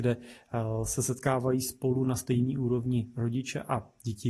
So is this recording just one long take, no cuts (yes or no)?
yes